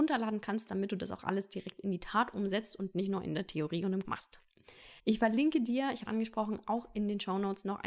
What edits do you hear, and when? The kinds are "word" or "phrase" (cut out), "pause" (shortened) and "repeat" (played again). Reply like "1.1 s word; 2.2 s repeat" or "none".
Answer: 4.0 s word; 5.0 s pause; 6.1 s word